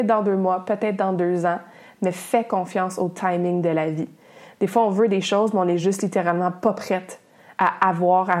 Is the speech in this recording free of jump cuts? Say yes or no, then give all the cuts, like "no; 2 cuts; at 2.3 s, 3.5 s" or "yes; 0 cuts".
yes; 0 cuts